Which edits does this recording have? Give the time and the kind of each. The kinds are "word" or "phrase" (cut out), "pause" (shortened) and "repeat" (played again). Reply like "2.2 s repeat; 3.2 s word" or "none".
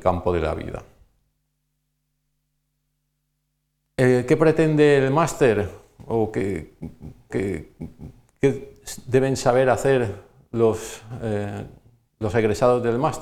7.3 s repeat